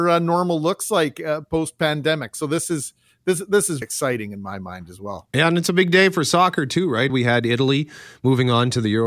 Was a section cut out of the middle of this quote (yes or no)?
yes